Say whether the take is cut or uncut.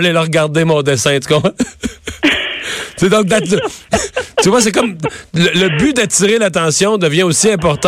uncut